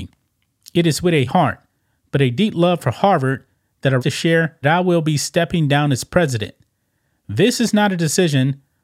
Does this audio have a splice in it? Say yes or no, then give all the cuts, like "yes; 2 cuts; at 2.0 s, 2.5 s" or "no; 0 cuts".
yes; 3 cuts; at 1.3 s, 4.0 s, 4.6 s